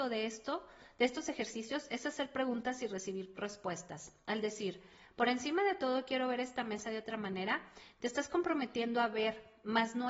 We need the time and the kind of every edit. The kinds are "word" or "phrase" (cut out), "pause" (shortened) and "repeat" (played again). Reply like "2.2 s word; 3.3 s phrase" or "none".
none

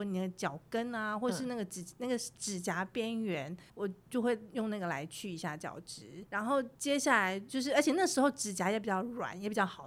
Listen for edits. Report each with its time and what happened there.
3.7 s pause

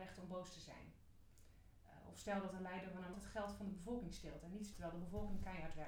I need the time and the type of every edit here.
3.1 s word; 4.7 s word

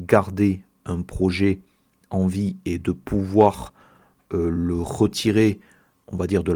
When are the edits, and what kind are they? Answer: none

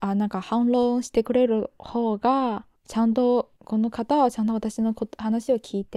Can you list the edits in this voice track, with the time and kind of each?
2.8 s pause; 3.6 s pause

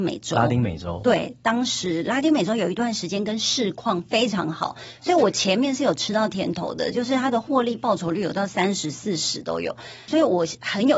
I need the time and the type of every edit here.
10.1 s phrase

